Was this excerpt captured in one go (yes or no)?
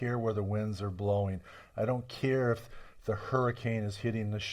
yes